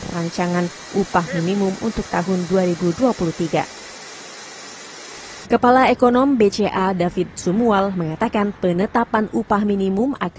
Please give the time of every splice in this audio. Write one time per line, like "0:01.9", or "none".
0:08.6